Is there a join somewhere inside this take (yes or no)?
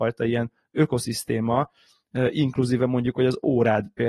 no